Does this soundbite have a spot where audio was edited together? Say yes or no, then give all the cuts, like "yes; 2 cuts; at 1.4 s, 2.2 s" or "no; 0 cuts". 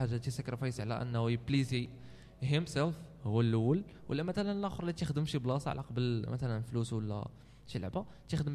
no; 0 cuts